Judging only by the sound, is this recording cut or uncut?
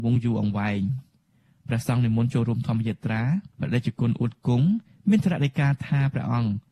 uncut